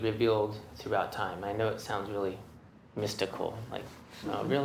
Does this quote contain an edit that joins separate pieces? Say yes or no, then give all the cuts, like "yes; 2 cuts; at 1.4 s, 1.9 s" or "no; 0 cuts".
no; 0 cuts